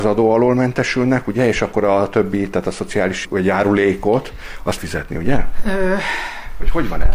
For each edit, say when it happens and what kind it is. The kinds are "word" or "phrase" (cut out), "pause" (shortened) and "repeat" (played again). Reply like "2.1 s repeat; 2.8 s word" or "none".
3.2 s word; 4.8 s phrase